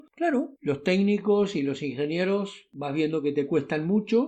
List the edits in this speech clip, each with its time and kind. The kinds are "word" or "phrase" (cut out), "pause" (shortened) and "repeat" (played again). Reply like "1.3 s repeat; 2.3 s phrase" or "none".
none